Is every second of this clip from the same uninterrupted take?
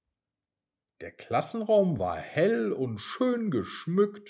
yes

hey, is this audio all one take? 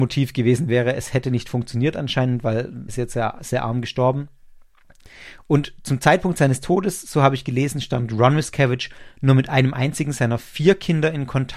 no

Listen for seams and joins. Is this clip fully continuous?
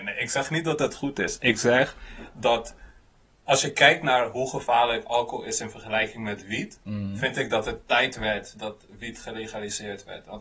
yes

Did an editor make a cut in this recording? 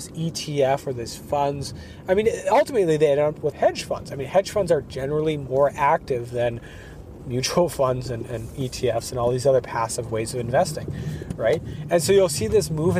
yes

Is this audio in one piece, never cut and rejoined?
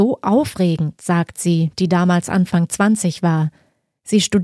yes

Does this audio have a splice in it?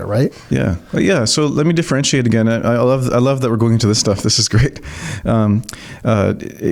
no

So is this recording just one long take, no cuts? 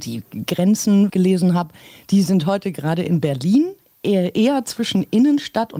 no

